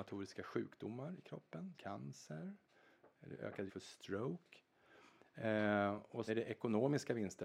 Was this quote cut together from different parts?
yes; 3 cuts; at 1.7 s, 3.7 s, 6.3 s

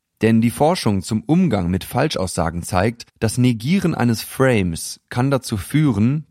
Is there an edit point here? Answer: yes; 1 cut; at 3.1 s

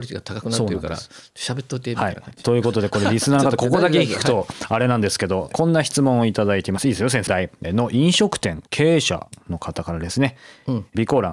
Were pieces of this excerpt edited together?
yes; 1 cut; at 7.3 s

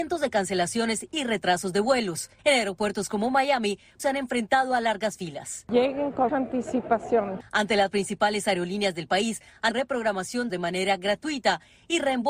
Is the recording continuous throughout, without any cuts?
no; 6 cuts; at 2.4 s, 4.0 s, 6.3 s, 7.9 s, 9.7 s, 10.5 s

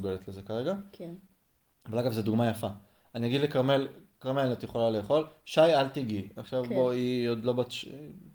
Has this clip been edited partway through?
no; 0 cuts

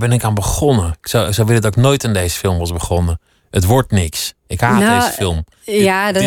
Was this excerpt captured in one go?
yes; 0 cuts

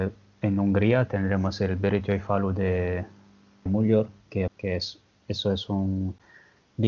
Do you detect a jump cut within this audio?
yes; 2 cuts; at 3.7 s, 4.5 s

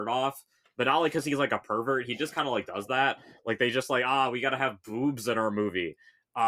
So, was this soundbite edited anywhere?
no; 0 cuts

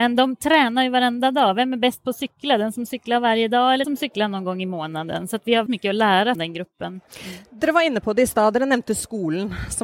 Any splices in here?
yes; 4 cuts; at 3.8 s, 5.7 s, 6.4 s, 7.1 s

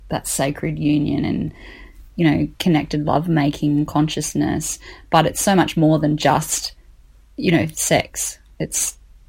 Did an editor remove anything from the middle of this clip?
no; 0 cuts

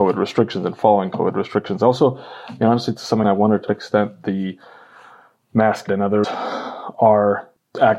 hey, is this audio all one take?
no; 4 cuts; at 3.2 s, 3.7 s, 5.9 s, 6.2 s

